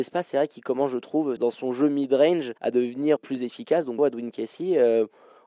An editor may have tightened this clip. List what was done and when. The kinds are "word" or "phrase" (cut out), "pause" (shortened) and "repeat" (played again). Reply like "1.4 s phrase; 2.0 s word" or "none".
1.4 s word; 2.6 s pause; 3.2 s word; 4.0 s word